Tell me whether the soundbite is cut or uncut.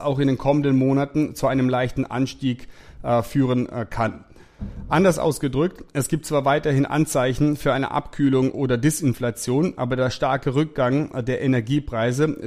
uncut